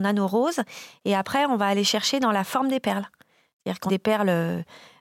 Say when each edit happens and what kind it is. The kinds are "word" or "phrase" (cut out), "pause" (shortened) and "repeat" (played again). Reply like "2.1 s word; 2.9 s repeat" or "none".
3.9 s word